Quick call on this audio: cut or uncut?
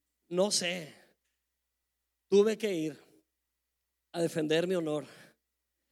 uncut